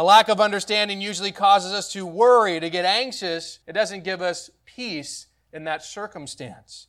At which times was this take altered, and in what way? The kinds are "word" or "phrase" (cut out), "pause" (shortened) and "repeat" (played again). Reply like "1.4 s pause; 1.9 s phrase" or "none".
3.6 s pause